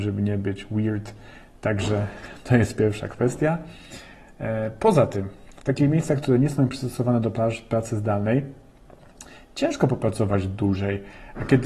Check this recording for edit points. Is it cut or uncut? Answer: uncut